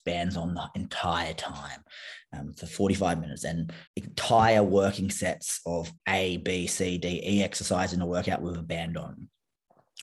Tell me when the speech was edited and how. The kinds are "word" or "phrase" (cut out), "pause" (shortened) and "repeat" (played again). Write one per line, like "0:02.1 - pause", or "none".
0:03.9 - pause
0:06.0 - pause